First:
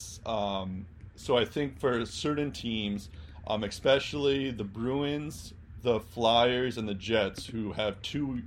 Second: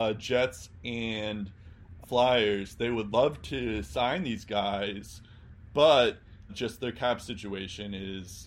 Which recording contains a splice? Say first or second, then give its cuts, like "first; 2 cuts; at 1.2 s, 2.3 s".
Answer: second; 2 cuts; at 2.0 s, 6.5 s